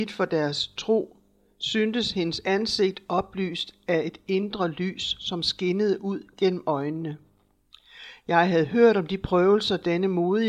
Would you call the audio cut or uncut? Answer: uncut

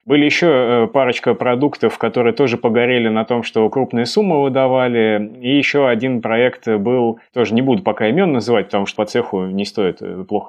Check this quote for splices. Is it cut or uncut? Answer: cut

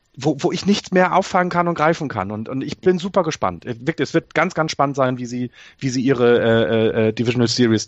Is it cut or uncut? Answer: uncut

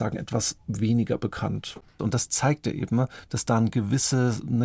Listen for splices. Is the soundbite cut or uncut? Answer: cut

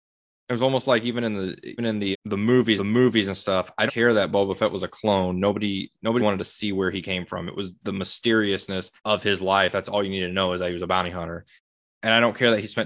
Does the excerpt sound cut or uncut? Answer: cut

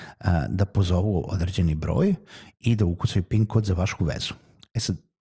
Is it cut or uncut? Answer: cut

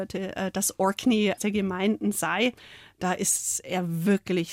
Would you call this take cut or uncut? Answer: cut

